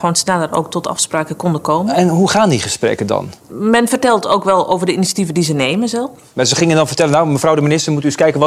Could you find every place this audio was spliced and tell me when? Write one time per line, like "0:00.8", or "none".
0:03.4